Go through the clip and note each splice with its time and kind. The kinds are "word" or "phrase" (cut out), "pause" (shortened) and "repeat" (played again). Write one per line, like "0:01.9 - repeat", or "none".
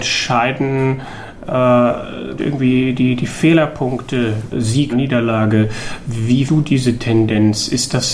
0:02.4 - word
0:04.5 - word
0:04.9 - word
0:06.5 - word